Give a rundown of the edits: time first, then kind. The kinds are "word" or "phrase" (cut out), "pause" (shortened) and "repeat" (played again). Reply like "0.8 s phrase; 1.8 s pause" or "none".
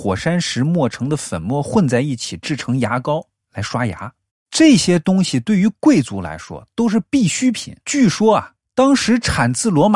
4.3 s pause; 7.8 s pause